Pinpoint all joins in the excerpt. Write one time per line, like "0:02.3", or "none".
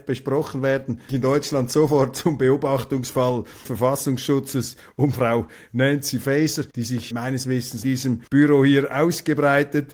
0:01.1
0:03.6
0:05.1
0:06.7
0:07.1
0:07.8
0:08.3